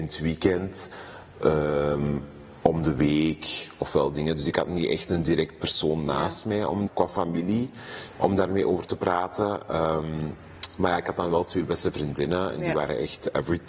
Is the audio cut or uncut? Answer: cut